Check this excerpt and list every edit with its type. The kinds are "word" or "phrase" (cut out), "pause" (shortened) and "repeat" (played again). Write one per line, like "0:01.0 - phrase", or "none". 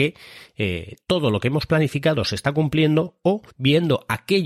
0:03.5 - pause